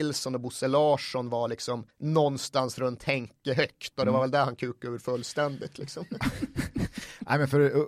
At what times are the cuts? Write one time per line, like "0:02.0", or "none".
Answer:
0:01.9